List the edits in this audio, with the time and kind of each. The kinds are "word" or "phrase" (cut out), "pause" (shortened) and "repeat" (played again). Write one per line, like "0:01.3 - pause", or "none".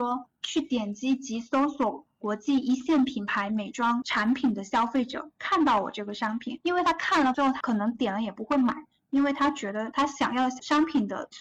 none